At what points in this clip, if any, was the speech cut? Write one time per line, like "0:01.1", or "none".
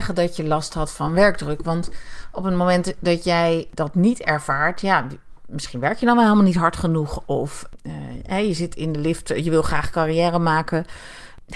none